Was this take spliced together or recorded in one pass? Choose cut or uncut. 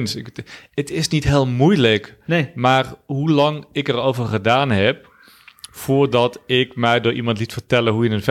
uncut